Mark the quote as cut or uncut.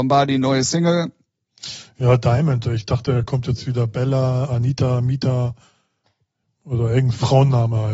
uncut